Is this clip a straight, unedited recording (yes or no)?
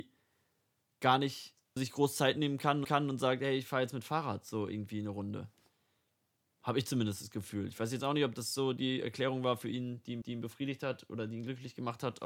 no